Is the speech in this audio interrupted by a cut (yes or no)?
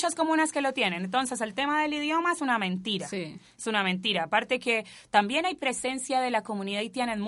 no